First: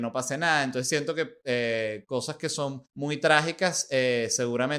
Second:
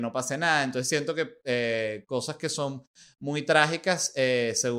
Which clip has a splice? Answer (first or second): first